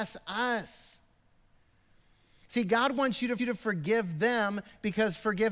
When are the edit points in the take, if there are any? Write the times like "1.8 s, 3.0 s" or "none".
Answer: 3.4 s

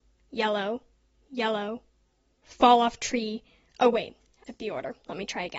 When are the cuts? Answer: 4.5 s

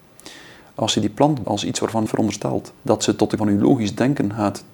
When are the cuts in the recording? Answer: 1.4 s, 2.1 s, 2.8 s, 3.4 s

